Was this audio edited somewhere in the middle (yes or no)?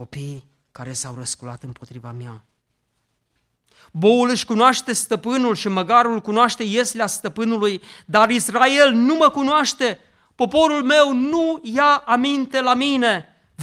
no